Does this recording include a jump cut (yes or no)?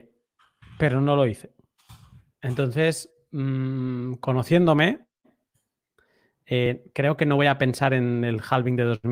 no